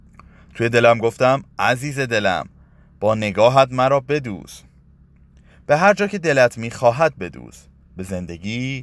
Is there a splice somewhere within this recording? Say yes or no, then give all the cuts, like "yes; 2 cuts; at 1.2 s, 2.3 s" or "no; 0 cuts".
no; 0 cuts